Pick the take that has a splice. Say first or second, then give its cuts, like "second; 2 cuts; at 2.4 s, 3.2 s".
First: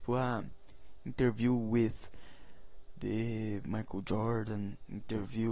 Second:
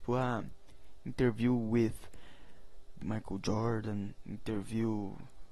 second; 1 cut; at 3.0 s